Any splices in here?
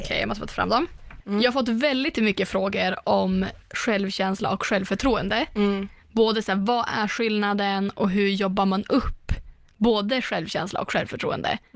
no; 0 cuts

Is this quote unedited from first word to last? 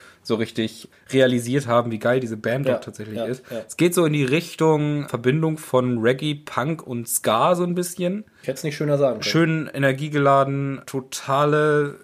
yes; 0 cuts

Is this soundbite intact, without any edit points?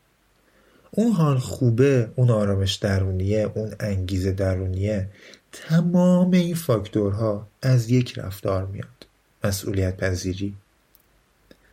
yes; 0 cuts

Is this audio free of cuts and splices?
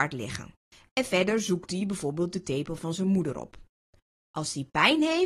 yes; 0 cuts

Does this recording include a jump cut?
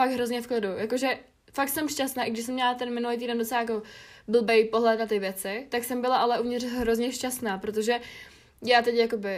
no; 0 cuts

